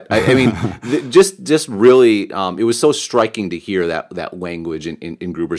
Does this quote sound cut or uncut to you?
uncut